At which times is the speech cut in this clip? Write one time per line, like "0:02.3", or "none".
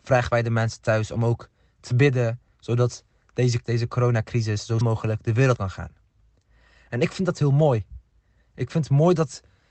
0:03.6
0:04.8
0:05.6